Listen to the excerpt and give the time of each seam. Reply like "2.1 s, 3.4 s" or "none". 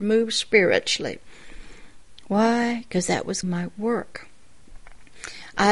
3.4 s